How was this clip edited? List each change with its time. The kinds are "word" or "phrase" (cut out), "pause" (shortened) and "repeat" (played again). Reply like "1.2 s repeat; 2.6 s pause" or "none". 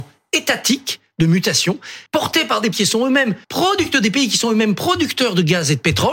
2.1 s pause; 2.7 s word; 3.4 s pause

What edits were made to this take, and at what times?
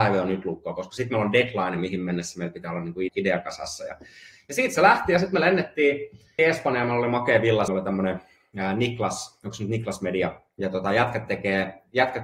3.1 s word; 6.4 s word; 7.7 s phrase

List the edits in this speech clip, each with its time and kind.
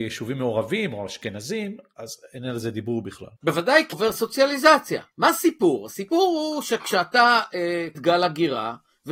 3.4 s pause; 3.9 s word; 5.1 s pause; 7.9 s word

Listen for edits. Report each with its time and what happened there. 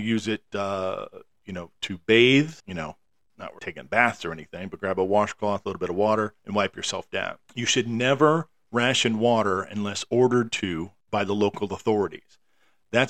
1.8 s word; 2.6 s pause; 3.6 s word; 6.4 s pause; 7.4 s pause; 11.0 s pause

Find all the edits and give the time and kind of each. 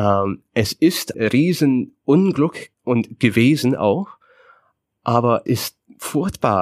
1.1 s word; 2.7 s pause; 5.5 s word

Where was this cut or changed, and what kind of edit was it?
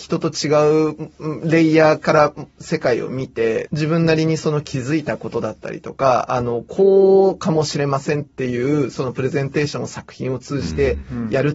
3.7 s word

